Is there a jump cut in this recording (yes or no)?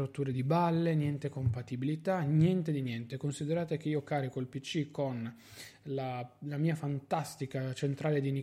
no